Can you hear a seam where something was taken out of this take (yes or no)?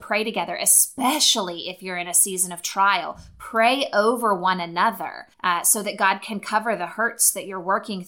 yes